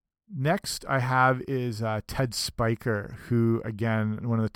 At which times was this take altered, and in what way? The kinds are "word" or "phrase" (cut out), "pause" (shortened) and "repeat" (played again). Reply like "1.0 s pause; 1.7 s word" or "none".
none